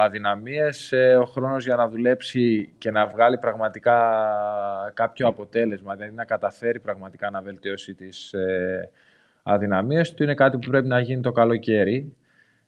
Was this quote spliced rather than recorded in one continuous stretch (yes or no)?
no